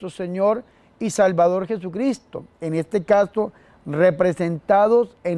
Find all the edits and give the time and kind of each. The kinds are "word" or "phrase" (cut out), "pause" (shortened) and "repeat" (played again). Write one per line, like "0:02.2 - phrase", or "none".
none

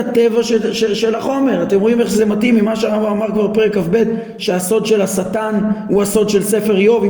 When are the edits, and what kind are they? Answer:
none

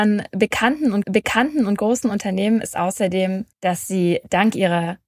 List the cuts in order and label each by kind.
0:01.0 - repeat
0:03.5 - pause

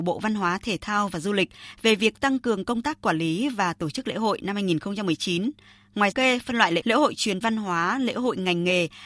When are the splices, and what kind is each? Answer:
0:06.1 - phrase
0:06.8 - word
0:07.4 - phrase

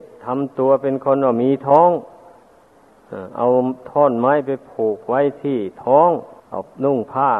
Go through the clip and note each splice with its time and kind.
0:06.4 - pause

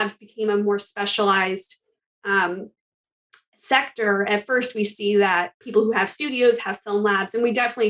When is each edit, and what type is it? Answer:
none

